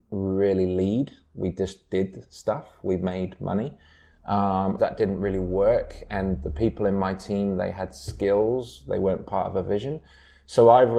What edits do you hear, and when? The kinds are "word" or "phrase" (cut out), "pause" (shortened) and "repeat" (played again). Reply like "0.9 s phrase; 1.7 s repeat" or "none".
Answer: 4.8 s phrase